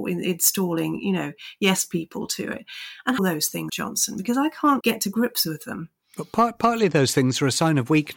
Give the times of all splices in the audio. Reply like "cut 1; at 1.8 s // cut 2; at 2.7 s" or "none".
cut 1; at 3.2 s // cut 2; at 3.7 s // cut 3; at 4.8 s